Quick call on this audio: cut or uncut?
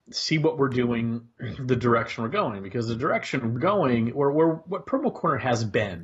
cut